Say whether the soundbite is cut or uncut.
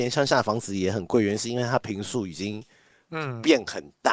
uncut